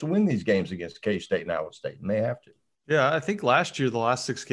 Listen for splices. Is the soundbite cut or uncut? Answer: uncut